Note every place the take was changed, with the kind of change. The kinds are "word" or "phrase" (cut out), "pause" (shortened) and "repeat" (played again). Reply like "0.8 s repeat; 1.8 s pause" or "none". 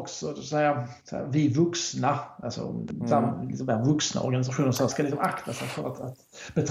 1.0 s pause; 2.4 s word; 4.9 s word